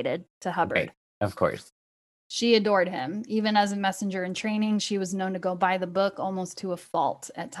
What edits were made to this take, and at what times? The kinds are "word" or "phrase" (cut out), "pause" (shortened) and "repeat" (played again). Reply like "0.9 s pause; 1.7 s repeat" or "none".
none